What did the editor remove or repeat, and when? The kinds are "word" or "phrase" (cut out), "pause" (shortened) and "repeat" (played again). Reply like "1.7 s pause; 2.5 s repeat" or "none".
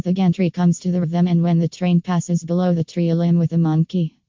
1.0 s word